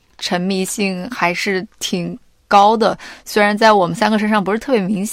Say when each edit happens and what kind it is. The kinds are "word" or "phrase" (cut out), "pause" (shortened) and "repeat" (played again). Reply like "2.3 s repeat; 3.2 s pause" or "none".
none